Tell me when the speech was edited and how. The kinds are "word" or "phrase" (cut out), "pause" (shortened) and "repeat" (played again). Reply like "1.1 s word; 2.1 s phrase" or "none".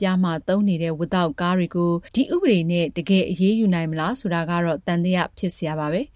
2.1 s pause